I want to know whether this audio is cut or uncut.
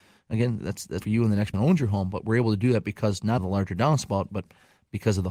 cut